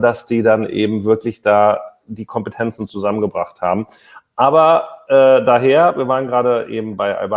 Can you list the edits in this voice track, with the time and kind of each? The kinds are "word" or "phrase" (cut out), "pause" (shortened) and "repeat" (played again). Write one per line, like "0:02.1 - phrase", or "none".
none